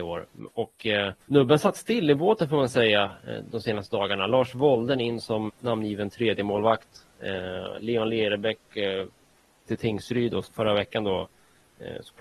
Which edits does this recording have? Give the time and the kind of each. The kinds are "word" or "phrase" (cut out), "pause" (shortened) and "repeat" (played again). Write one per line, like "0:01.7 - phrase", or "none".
0:01.7 - word
0:05.5 - word
0:09.7 - word
0:10.5 - word